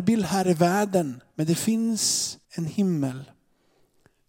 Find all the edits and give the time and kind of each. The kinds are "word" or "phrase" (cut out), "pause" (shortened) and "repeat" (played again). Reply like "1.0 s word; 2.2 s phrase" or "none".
1.3 s pause; 2.4 s pause